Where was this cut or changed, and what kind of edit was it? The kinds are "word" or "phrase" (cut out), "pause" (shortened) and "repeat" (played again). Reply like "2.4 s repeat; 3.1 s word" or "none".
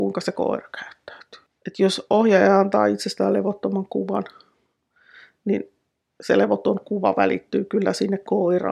none